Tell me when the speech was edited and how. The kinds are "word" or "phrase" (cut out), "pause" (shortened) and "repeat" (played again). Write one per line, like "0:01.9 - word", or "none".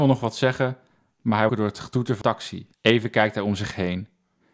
0:01.5 - phrase
0:02.2 - word
0:02.7 - pause